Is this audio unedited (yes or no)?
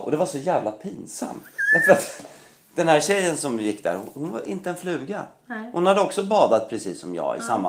yes